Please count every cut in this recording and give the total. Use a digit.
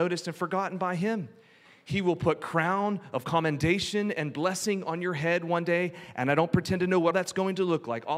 1